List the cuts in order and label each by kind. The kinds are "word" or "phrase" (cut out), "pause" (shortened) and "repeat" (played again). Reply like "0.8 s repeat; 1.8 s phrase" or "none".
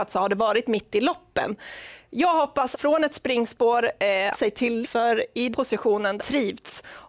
2.7 s word; 4.3 s phrase; 4.8 s word; 5.5 s word; 6.2 s phrase